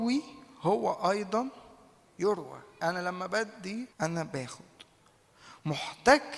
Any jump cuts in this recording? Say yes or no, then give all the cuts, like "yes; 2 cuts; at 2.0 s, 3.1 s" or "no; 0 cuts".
yes; 2 cuts; at 2.8 s, 3.9 s